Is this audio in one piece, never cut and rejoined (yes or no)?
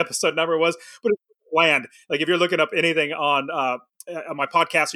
yes